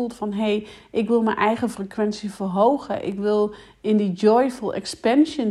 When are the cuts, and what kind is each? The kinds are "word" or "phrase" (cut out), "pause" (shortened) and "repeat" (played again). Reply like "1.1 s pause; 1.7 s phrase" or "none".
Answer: none